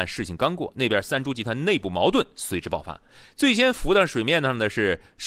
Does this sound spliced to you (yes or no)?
no